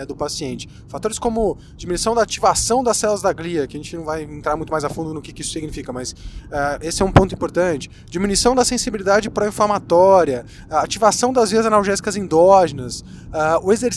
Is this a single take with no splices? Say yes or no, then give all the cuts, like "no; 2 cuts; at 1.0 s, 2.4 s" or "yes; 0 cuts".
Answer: yes; 0 cuts